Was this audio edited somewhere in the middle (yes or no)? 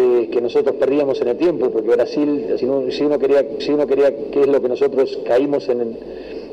yes